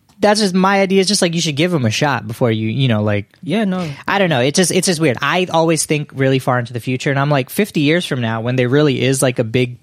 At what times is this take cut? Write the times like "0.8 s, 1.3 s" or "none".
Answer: 3.4 s